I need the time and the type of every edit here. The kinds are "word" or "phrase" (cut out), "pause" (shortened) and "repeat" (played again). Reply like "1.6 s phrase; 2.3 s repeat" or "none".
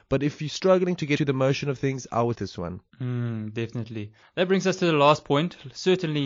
1.2 s word; 2.3 s phrase; 2.9 s pause; 4.2 s pause